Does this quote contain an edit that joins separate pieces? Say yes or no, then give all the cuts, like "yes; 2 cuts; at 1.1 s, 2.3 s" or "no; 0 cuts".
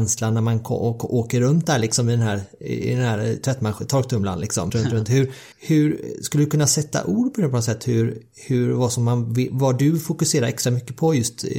yes; 2 cuts; at 4.7 s, 5.5 s